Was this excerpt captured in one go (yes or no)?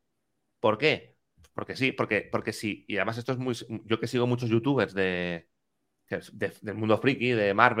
yes